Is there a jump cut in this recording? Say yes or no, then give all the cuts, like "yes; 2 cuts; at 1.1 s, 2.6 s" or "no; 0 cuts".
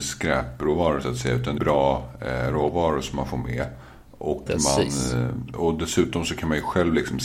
yes; 2 cuts; at 1.6 s, 4.5 s